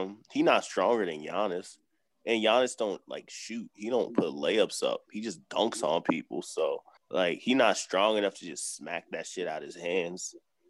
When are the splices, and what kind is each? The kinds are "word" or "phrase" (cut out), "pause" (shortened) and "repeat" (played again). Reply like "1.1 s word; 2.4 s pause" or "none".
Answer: 7.0 s pause